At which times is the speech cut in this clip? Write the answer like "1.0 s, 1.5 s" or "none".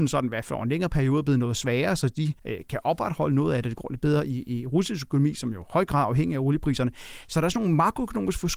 2.4 s